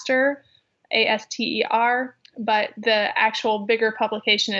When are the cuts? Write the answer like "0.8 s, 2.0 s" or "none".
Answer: none